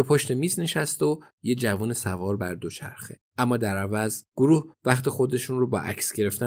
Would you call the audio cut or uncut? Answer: cut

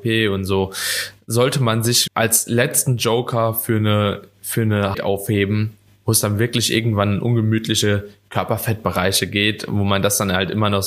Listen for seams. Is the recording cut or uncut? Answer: cut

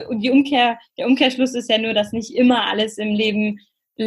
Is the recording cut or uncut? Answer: uncut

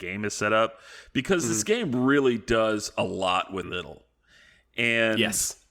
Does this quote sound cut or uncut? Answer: cut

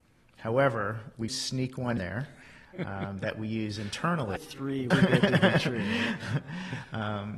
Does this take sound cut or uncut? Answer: cut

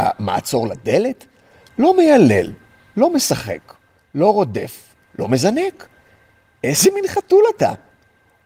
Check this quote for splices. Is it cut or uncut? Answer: uncut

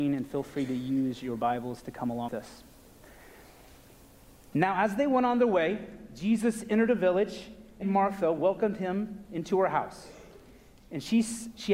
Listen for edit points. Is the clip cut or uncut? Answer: cut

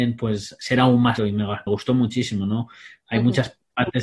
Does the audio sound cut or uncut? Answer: cut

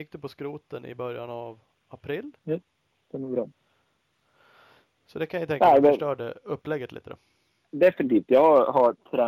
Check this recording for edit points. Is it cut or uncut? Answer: cut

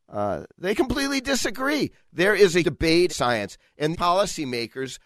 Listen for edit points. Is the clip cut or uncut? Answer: cut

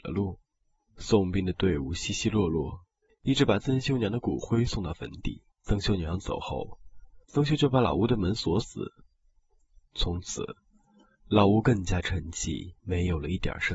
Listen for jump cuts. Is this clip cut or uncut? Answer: cut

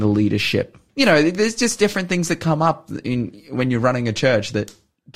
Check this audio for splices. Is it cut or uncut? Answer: uncut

